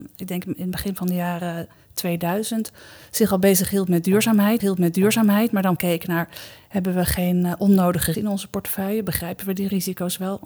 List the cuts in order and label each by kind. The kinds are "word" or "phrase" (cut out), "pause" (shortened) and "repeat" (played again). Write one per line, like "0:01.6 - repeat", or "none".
0:04.6 - repeat
0:05.8 - word
0:08.1 - word